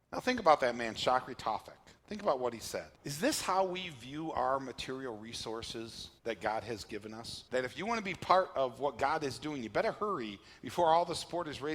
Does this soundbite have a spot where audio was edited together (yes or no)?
yes